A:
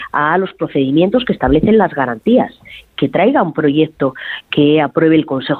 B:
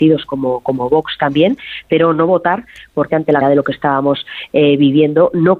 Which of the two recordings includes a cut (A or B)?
B